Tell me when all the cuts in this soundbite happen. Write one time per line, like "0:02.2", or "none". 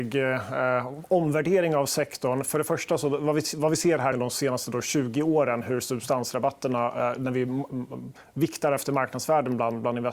0:04.1